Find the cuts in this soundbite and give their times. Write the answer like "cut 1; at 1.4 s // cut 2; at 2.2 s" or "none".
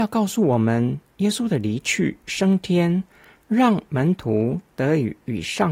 none